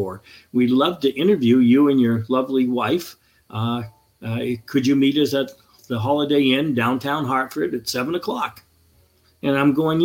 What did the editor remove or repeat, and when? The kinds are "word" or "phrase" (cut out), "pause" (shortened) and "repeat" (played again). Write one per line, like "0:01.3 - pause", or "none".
none